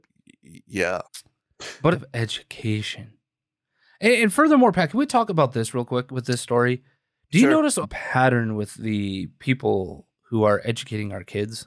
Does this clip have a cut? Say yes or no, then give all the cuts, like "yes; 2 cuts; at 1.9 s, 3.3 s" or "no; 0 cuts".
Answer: yes; 4 cuts; at 1.0 s, 1.9 s, 6.1 s, 7.8 s